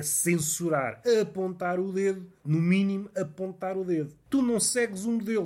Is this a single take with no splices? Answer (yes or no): no